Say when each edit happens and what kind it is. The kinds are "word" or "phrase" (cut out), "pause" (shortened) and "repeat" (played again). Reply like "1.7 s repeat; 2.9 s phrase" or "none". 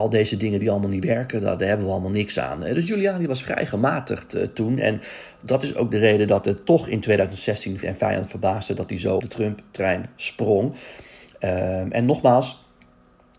7.8 s word; 9.2 s word